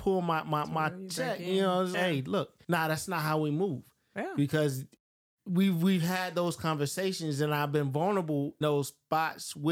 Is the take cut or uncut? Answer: cut